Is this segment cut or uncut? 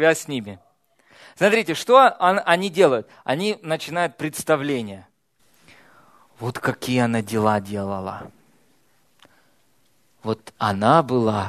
uncut